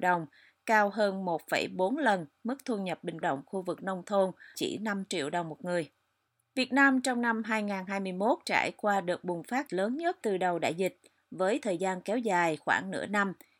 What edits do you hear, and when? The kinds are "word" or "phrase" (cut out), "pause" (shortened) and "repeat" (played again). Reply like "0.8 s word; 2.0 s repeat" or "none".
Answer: 3.2 s phrase; 4.5 s word; 8.4 s word; 9.7 s word; 10.2 s word